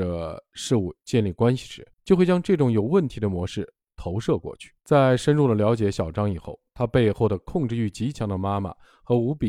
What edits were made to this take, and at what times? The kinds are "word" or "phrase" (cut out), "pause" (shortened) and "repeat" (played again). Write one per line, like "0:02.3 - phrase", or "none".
0:01.9 - pause
0:04.8 - pause